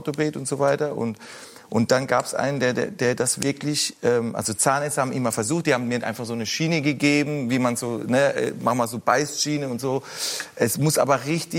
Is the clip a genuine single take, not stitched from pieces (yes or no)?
yes